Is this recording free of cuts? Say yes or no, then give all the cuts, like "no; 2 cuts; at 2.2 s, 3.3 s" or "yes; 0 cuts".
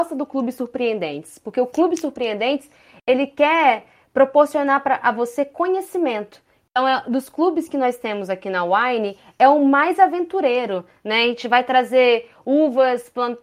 yes; 0 cuts